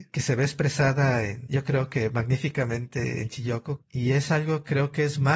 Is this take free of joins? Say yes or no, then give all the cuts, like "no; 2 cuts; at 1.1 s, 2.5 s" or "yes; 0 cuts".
yes; 0 cuts